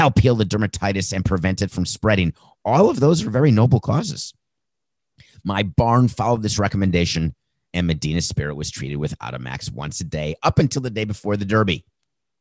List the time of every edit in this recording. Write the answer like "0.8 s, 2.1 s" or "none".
none